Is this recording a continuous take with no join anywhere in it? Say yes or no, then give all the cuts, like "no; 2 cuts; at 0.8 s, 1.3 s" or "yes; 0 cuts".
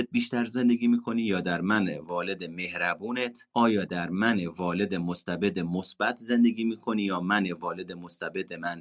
no; 1 cut; at 3.5 s